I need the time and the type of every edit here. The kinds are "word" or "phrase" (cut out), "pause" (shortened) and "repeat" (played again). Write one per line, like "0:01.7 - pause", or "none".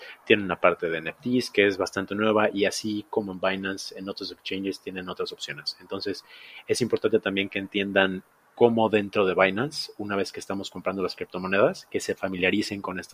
none